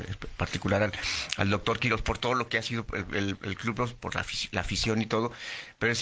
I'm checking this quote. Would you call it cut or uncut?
uncut